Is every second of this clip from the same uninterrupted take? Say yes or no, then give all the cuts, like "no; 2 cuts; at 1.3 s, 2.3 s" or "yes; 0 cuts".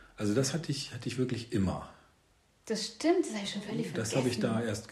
yes; 0 cuts